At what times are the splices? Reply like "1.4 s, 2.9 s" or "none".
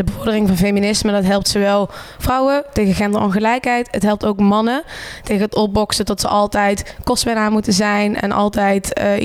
7.0 s